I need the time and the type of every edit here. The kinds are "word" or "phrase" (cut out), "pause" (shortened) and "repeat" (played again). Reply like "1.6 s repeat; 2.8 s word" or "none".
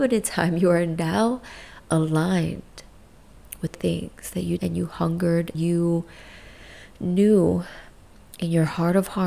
3.7 s word; 4.6 s word; 5.5 s word